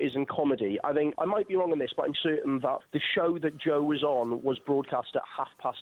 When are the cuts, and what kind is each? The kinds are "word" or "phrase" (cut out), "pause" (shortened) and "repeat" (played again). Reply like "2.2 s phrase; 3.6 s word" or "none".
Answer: 1.1 s word; 2.1 s word; 2.8 s word